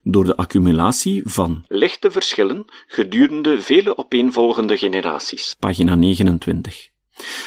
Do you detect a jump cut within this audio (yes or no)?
no